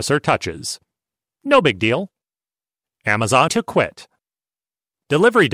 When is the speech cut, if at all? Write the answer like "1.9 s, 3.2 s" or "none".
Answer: 3.5 s